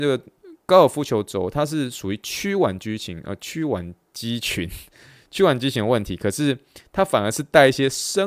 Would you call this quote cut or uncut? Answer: uncut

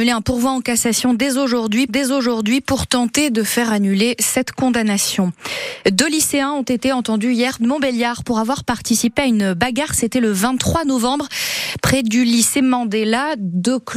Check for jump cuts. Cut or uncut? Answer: cut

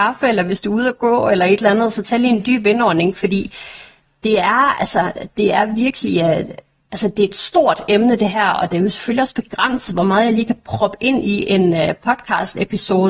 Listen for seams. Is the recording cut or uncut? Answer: uncut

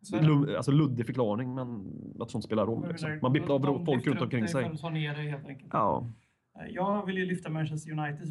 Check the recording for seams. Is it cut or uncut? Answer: cut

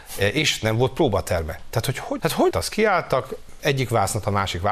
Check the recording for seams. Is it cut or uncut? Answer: cut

